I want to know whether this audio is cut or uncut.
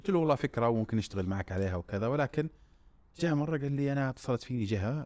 uncut